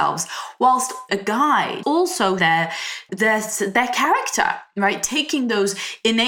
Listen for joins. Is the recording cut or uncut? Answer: cut